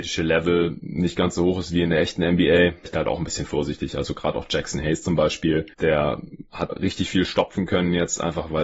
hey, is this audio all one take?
no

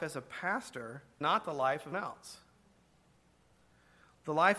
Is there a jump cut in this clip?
yes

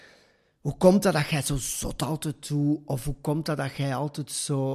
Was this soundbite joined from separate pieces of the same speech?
no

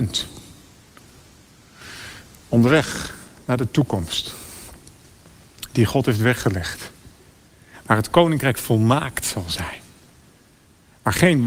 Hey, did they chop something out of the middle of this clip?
no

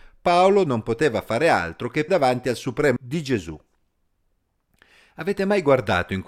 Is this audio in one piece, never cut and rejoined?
no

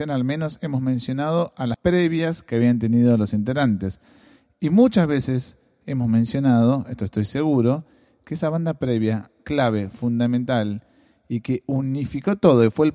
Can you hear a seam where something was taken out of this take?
yes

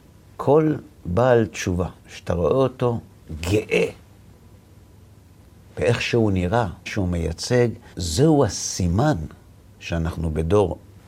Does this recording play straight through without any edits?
no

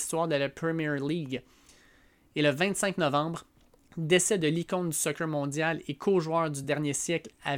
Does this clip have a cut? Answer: no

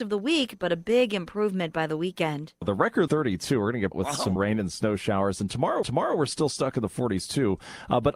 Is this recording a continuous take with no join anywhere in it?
no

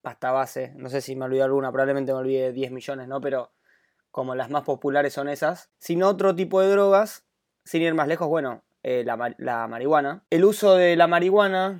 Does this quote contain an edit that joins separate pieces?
no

